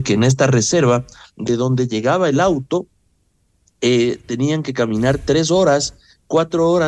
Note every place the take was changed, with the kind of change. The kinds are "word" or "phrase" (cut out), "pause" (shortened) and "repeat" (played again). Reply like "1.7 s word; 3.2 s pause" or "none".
none